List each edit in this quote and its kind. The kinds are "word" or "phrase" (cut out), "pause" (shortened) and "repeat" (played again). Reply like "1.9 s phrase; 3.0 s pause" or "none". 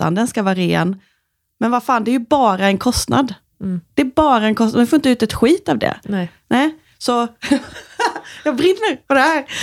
none

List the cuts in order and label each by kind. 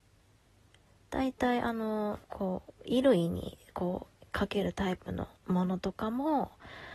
2.2 s pause; 4.1 s pause; 5.4 s pause

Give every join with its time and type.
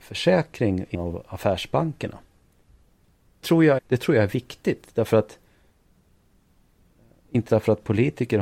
0.9 s word; 3.4 s word; 3.8 s word; 7.5 s word

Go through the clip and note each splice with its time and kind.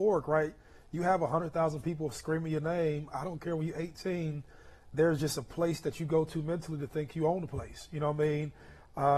none

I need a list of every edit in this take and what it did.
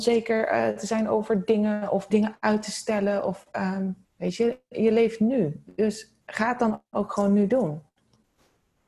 2.1 s word; 4.0 s pause; 6.2 s pause

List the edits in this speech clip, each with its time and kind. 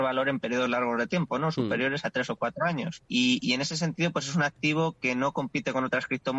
3.1 s pause

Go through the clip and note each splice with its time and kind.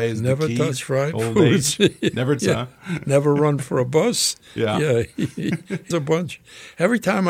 2.4 s phrase; 5.9 s word

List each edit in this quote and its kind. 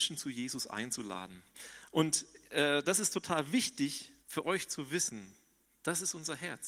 4.2 s pause

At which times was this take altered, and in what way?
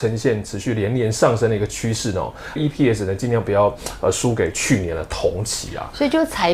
2.6 s phrase

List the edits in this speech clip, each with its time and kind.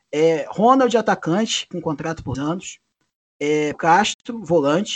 1.7 s phrase; 2.3 s word; 3.7 s word

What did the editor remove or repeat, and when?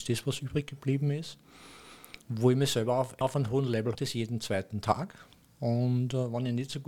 2.2 s pause; 3.2 s word; 3.9 s phrase

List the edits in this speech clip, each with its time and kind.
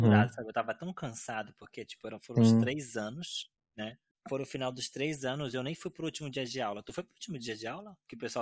none

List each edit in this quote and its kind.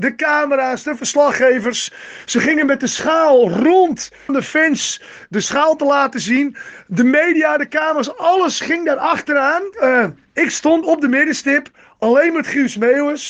4.3 s phrase; 9.7 s pause; 10.8 s word

